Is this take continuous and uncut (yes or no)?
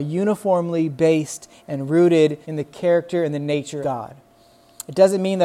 no